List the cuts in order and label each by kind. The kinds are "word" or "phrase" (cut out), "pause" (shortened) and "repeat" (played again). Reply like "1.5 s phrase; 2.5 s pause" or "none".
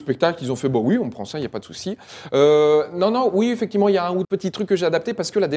4.2 s word